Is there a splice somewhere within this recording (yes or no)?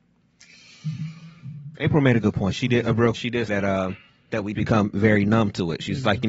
yes